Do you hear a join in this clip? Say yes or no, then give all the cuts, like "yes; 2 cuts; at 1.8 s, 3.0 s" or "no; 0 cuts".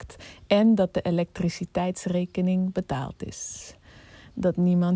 no; 0 cuts